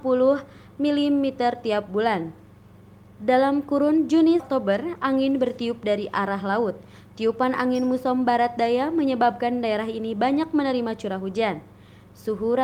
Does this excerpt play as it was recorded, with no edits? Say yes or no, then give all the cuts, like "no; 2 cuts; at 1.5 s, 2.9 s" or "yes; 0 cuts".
no; 1 cut; at 4.4 s